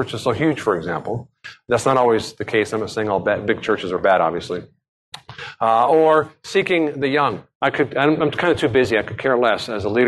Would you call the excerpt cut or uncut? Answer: cut